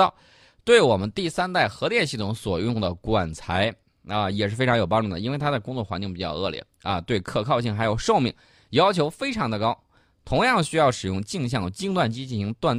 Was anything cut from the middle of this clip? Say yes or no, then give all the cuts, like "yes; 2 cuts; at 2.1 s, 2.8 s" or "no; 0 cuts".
no; 0 cuts